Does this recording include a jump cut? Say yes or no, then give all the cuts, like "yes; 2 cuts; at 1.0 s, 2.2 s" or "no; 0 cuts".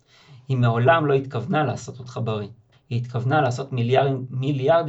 yes; 1 cut; at 2.7 s